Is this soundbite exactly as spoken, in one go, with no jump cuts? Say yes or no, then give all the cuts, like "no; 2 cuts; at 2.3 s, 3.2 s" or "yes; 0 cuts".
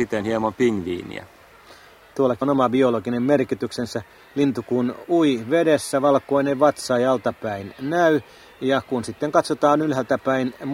no; 1 cut; at 2.4 s